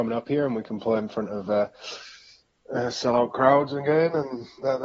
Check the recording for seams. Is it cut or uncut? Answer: uncut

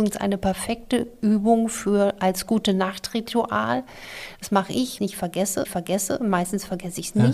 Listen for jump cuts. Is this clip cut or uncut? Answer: cut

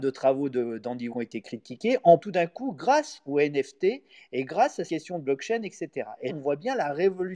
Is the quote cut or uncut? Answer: cut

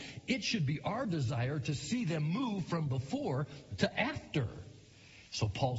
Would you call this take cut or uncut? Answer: uncut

